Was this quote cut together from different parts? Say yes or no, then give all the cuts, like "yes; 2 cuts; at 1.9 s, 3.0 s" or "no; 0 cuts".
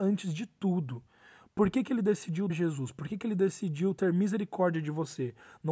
yes; 1 cut; at 2.5 s